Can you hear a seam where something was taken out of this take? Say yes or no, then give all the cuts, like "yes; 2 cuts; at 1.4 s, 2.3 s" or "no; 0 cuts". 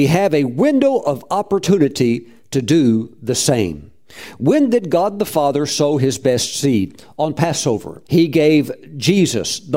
yes; 1 cut; at 8.0 s